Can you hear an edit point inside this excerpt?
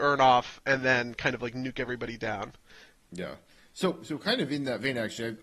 no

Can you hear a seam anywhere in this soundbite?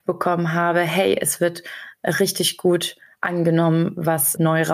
no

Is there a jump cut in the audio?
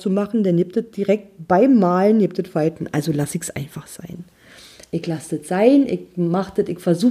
no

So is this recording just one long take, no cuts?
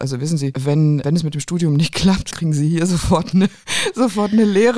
no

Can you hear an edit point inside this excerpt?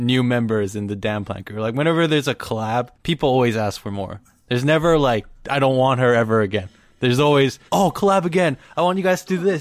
yes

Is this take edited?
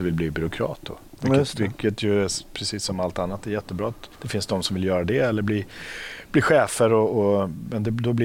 yes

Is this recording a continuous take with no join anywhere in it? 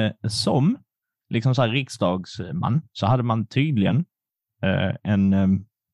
yes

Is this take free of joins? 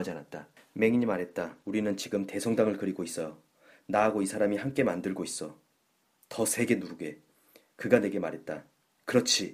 no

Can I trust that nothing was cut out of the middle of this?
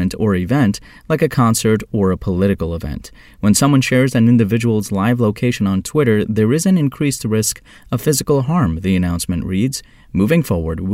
yes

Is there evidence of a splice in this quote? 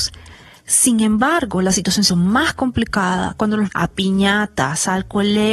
yes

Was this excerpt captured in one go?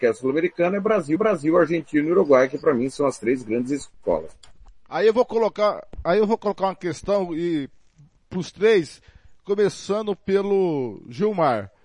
no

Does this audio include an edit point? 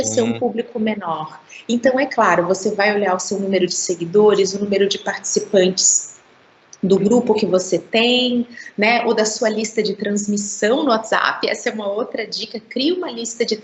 no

